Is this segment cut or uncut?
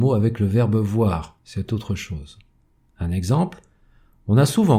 uncut